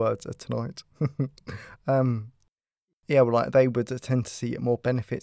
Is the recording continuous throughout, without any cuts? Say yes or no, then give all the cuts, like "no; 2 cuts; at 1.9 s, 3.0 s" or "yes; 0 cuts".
yes; 0 cuts